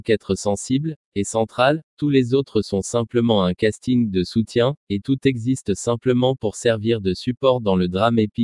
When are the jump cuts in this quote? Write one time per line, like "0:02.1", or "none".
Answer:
none